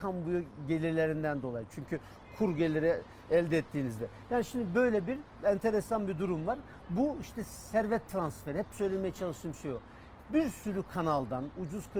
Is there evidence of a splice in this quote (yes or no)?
no